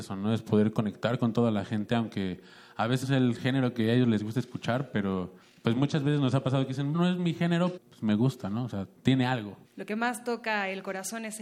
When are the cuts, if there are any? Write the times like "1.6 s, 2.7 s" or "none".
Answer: 3.0 s, 5.4 s, 6.9 s, 7.8 s, 9.6 s